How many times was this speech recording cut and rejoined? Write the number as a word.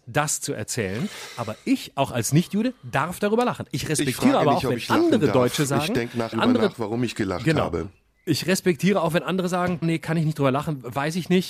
two